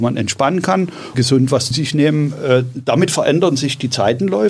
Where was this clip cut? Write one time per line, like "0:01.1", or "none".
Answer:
0:01.1
0:01.7